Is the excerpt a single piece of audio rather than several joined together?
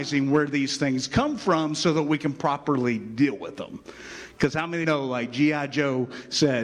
no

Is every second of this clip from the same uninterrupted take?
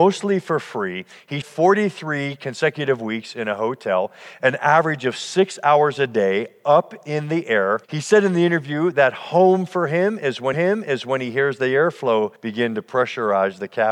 no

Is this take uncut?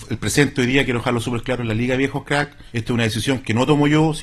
no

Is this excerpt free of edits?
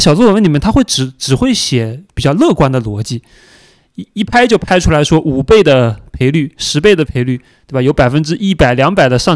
yes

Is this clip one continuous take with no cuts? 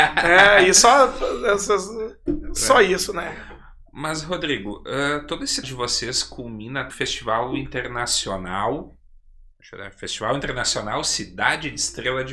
no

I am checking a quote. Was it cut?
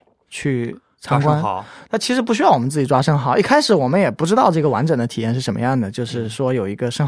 yes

